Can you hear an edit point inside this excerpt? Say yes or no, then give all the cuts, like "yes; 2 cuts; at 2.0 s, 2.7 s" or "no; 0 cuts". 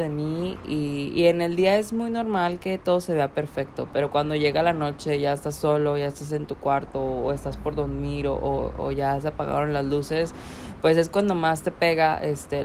no; 0 cuts